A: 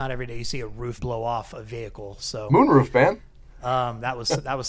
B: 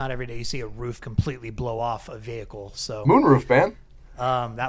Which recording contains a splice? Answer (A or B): A